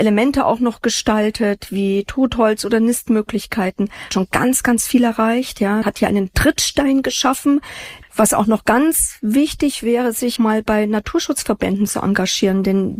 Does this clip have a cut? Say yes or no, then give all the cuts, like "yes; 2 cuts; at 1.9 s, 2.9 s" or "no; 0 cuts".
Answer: yes; 3 cuts; at 4.1 s, 5.8 s, 10.4 s